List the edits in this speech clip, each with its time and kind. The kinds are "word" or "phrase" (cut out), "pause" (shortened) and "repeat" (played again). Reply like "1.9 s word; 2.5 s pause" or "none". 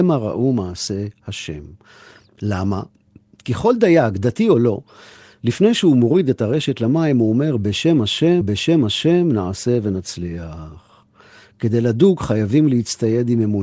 8.4 s repeat